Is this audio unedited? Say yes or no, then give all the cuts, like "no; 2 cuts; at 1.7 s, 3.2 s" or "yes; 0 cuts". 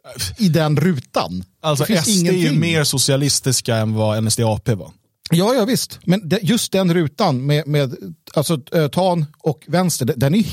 yes; 0 cuts